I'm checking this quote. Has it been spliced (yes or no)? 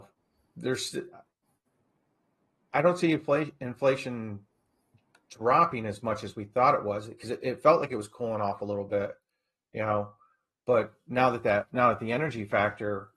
no